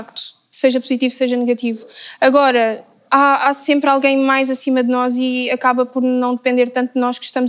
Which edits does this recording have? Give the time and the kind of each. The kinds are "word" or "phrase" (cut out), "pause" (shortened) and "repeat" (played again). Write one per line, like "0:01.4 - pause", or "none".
none